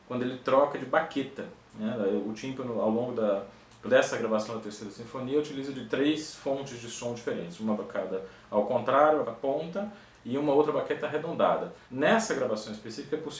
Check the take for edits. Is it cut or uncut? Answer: cut